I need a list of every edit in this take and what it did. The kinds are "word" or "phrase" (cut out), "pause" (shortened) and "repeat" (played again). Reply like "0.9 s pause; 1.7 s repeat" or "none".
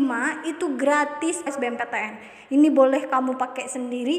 1.5 s phrase